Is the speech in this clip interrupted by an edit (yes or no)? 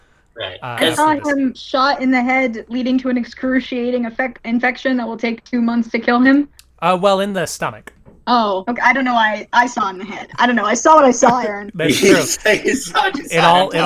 no